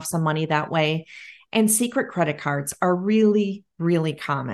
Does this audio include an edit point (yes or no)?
no